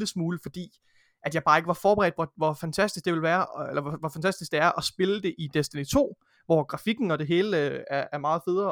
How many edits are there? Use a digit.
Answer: 1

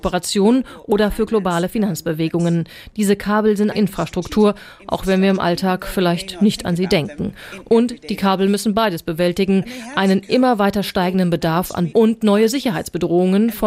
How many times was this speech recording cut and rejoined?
2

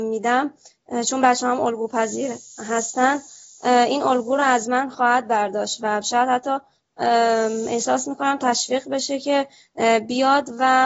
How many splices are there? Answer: 0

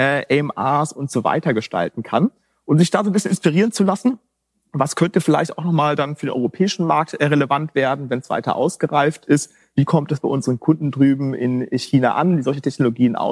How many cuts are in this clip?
0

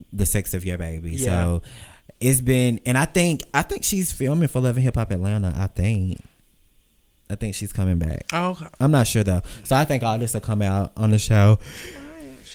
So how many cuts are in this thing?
0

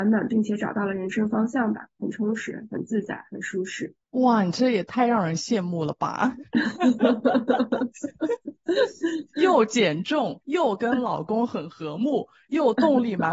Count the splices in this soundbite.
2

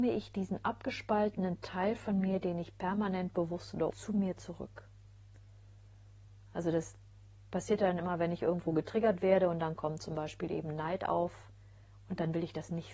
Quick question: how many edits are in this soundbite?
1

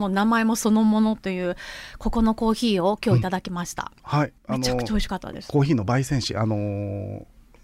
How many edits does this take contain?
1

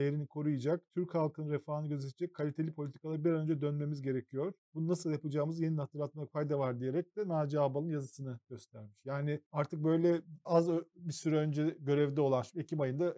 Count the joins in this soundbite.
3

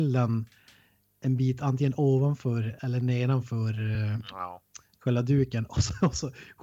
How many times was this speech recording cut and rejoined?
0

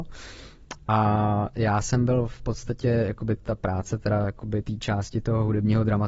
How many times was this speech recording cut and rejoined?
2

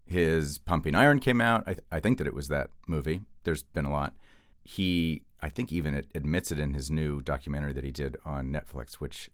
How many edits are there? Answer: 2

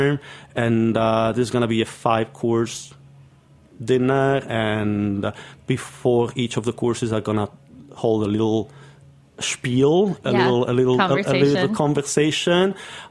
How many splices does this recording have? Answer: 0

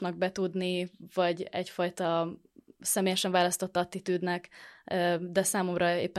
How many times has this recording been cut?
0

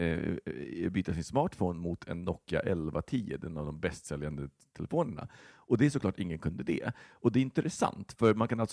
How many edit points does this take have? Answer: 0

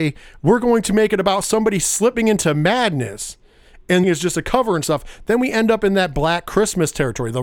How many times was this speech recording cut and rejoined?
1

